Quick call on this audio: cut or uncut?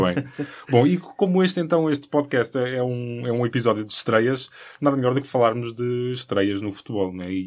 uncut